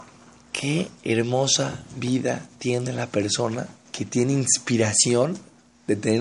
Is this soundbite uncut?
no; 1 cut; at 3.9 s

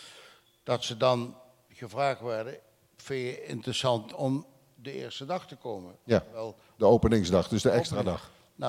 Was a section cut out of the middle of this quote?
no; 0 cuts

